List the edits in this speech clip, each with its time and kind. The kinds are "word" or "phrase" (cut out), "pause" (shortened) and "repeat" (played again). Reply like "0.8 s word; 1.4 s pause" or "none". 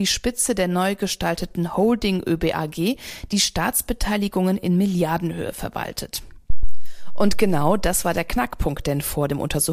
none